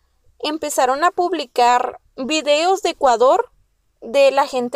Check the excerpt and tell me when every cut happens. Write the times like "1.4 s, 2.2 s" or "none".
2.1 s